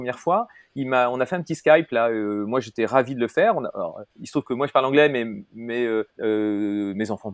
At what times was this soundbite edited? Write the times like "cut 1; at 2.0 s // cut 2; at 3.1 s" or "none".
cut 1; at 4.1 s // cut 2; at 6.1 s